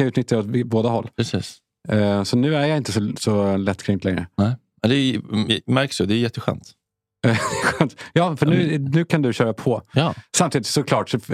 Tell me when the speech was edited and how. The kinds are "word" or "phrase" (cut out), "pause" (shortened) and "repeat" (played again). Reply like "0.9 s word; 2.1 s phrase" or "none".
none